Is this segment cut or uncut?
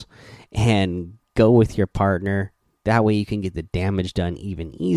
uncut